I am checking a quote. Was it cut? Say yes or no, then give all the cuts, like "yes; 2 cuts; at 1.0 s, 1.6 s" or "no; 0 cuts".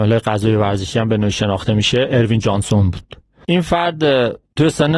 no; 0 cuts